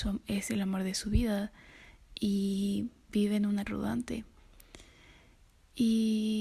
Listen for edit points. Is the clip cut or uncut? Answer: cut